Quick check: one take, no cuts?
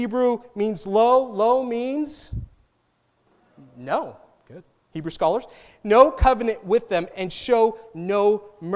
yes; 0 cuts

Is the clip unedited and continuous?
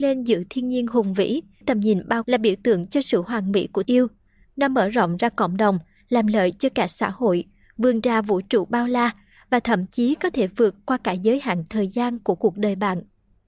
no; 3 cuts; at 1.6 s, 2.2 s, 3.8 s

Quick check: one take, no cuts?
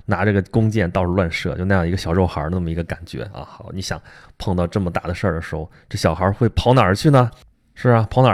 yes; 0 cuts

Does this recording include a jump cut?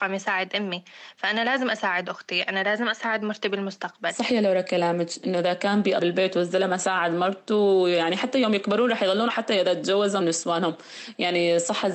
yes; 3 cuts; at 6.0 s, 9.3 s, 10.2 s

